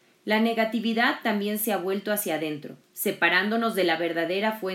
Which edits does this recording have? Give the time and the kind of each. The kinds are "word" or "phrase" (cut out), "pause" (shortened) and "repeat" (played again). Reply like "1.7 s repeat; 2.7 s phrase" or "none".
2.8 s pause